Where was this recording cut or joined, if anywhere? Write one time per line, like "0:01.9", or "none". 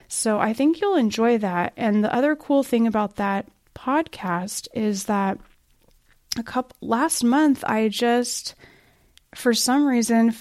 none